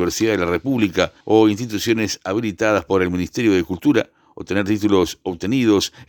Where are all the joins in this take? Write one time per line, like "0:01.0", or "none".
0:01.2